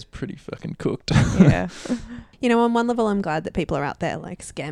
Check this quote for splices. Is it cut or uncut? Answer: uncut